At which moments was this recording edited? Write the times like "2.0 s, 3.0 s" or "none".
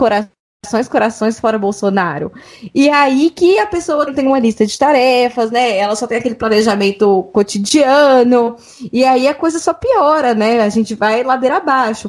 4.1 s